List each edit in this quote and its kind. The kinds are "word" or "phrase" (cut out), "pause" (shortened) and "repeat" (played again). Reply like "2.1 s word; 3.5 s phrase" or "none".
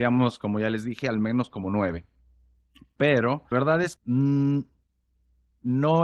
3.5 s word; 4.0 s word